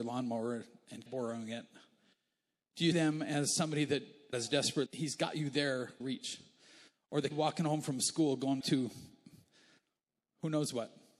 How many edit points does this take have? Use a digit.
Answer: 7